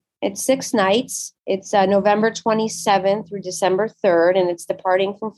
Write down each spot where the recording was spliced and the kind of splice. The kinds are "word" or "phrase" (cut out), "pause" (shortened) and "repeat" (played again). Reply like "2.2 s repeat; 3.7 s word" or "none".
1.4 s pause